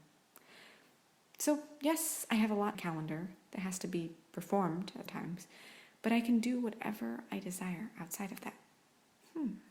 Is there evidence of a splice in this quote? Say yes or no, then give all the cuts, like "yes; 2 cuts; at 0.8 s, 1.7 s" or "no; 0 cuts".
yes; 2 cuts; at 2.7 s, 5.1 s